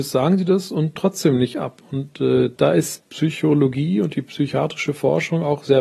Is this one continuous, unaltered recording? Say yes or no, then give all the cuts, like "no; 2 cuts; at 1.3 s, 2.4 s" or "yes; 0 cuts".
no; 3 cuts; at 1.0 s, 2.6 s, 3.0 s